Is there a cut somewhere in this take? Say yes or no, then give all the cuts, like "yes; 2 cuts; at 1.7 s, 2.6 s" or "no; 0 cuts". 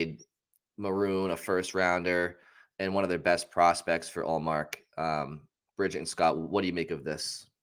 no; 0 cuts